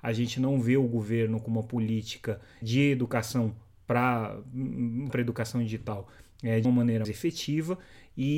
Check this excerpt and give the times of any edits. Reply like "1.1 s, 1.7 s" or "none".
2.6 s, 5.1 s, 6.6 s, 7.0 s